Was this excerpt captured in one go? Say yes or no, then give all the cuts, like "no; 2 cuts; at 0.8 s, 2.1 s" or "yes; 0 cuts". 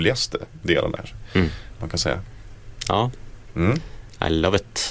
no; 1 cut; at 1.0 s